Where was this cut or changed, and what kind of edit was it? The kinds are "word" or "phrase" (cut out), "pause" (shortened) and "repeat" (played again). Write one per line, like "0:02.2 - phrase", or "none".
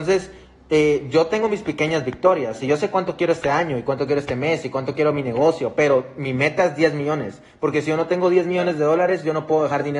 none